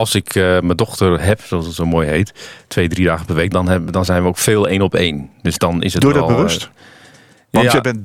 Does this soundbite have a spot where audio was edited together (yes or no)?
yes